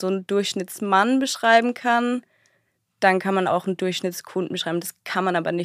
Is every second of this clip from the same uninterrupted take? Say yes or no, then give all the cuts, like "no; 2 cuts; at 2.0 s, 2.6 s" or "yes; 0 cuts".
yes; 0 cuts